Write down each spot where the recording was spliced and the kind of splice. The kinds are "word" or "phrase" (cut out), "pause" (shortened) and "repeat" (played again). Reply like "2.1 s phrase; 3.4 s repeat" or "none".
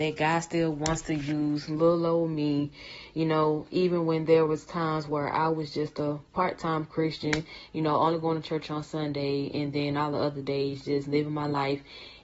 none